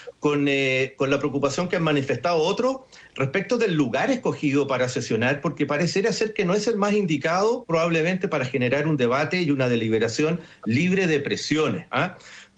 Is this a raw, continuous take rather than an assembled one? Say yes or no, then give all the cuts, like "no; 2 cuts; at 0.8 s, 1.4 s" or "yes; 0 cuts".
yes; 0 cuts